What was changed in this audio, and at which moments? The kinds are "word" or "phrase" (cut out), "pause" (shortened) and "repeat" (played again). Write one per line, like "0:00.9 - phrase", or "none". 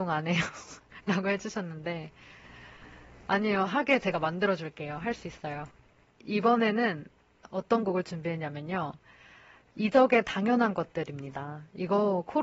none